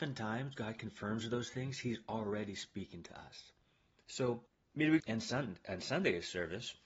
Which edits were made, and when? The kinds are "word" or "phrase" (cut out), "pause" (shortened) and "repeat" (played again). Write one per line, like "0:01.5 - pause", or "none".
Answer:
0:05.0 - word